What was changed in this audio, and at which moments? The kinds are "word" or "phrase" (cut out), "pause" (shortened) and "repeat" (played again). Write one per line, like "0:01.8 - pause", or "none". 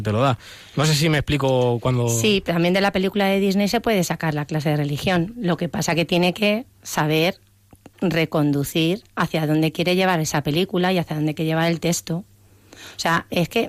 0:02.5 - word
0:09.1 - pause